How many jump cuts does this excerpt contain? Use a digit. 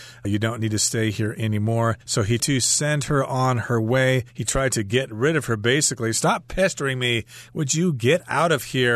3